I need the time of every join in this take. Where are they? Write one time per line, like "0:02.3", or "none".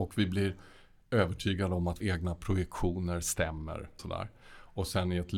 0:02.0
0:04.0